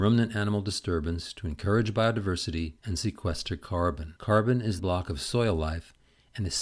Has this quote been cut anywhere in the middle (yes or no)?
yes